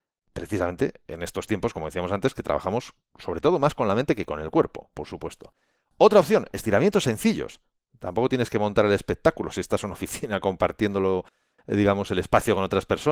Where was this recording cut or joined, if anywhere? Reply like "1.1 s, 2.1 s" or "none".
none